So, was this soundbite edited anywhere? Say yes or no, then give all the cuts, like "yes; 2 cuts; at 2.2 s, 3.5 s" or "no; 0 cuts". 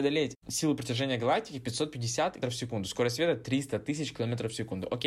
yes; 1 cut; at 2.4 s